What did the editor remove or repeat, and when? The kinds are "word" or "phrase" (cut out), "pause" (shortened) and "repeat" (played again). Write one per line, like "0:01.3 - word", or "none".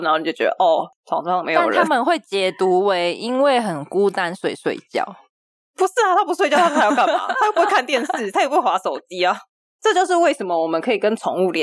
none